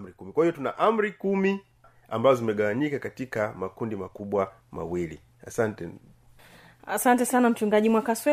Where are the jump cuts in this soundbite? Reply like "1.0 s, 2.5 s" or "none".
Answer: none